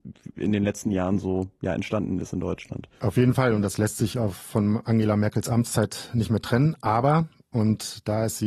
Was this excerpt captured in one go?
no; 1 cut; at 2.9 s

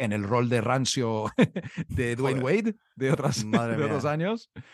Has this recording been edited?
no; 0 cuts

